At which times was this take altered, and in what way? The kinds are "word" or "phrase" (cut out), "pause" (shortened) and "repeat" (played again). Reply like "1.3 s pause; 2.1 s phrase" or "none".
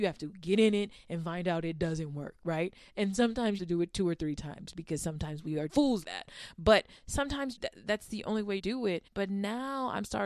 3.6 s phrase; 5.7 s word; 6.0 s word; 7.6 s word; 8.6 s phrase; 9.1 s pause

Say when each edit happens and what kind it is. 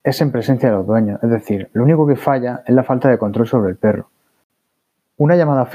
none

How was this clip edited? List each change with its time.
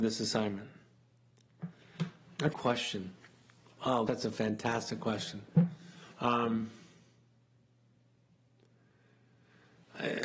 2.5 s phrase; 4.1 s word; 6.1 s pause

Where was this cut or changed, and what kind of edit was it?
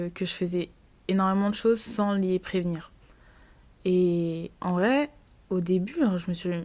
4.5 s pause

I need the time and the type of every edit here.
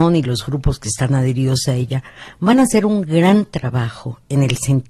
none

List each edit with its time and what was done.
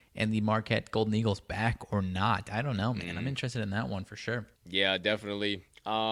4.6 s pause

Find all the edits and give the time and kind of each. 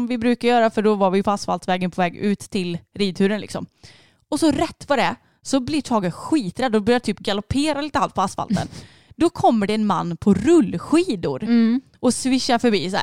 none

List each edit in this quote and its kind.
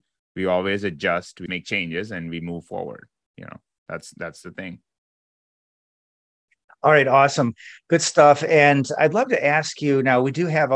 1.5 s word

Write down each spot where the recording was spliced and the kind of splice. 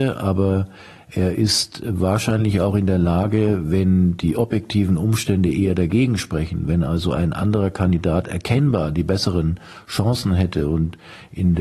none

